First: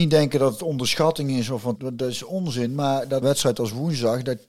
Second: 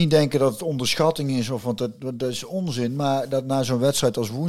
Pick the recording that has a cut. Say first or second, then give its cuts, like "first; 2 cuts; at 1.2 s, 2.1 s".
first; 2 cuts; at 1.8 s, 3.2 s